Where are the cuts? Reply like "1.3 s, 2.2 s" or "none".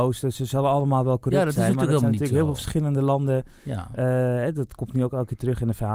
none